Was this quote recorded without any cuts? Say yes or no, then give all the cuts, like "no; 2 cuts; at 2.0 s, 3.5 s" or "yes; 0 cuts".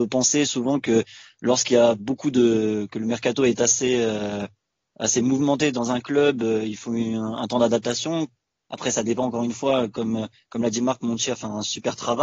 yes; 0 cuts